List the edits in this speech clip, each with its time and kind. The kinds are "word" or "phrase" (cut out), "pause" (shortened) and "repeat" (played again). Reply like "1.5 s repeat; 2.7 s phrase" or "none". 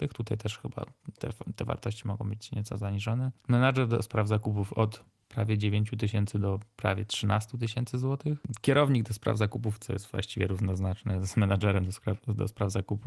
none